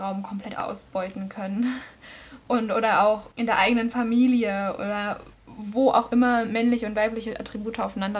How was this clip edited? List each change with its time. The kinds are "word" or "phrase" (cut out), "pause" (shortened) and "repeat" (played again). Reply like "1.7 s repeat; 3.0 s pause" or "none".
3.3 s pause